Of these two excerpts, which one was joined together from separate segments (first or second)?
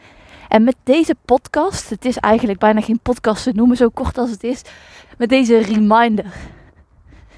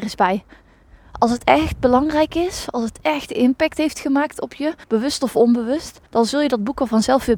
second